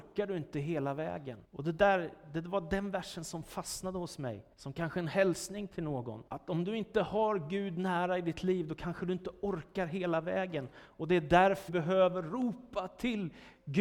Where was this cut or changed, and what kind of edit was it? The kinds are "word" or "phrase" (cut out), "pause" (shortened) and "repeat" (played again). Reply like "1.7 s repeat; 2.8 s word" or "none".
1.4 s pause; 4.5 s pause; 6.3 s pause; 11.7 s word